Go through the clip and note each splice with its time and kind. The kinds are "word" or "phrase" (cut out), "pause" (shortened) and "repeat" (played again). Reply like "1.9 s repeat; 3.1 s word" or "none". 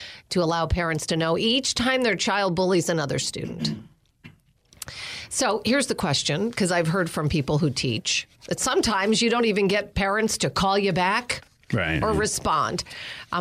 none